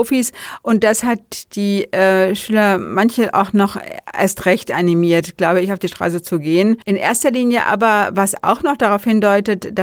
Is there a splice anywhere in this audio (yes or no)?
yes